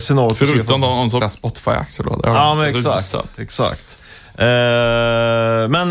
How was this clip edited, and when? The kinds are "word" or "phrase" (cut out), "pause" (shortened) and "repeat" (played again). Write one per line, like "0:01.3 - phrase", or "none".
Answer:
0:01.2 - word